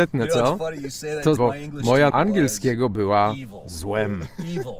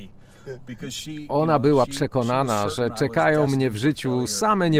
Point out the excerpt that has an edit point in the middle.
first; 2 cuts; at 1.4 s, 2.1 s

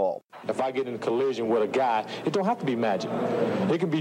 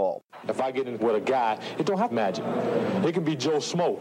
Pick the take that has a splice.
second; 2 cuts; at 1.0 s, 2.1 s

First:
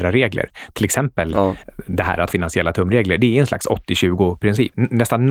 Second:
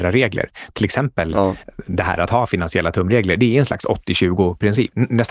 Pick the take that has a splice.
first; 1 cut; at 2.3 s

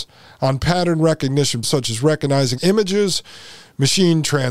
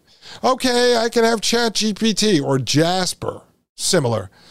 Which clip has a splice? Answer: first; 2 cuts; at 1.6 s, 2.6 s

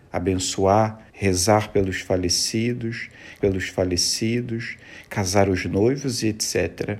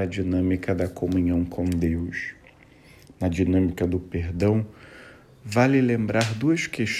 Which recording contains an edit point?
first; 2 cuts; at 1.1 s, 3.4 s

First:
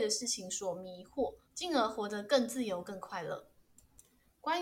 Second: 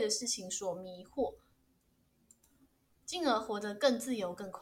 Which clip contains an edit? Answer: first; 1 cut; at 1.4 s

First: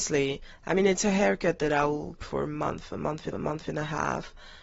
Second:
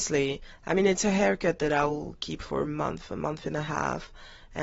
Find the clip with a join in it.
first; 2 cuts; at 2.2 s, 3.3 s

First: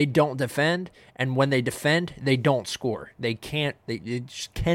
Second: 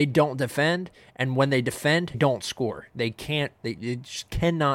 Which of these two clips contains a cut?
second; 1 cut; at 2.1 s

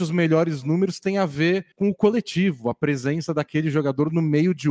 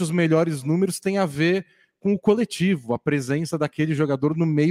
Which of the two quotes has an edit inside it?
first; 1 cut; at 1.7 s

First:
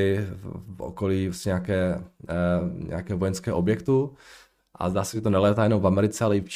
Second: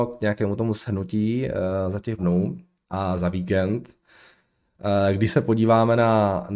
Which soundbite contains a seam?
second; 2 cuts; at 2.2 s, 2.8 s

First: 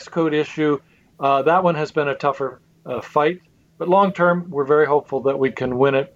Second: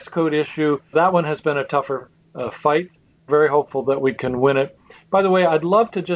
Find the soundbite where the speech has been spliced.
second; 2 cuts; at 0.9 s, 3.3 s

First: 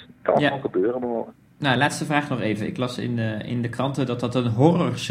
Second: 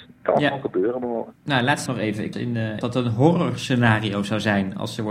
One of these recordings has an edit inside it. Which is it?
second; 4 cuts; at 1.4 s, 1.9 s, 2.3 s, 2.8 s

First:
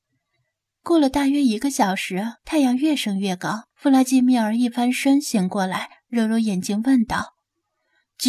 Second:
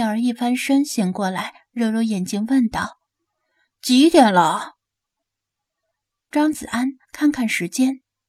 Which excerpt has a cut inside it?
first; 2 cuts; at 2.4 s, 3.7 s

